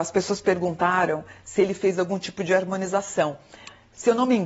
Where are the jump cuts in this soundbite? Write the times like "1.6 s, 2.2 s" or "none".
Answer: none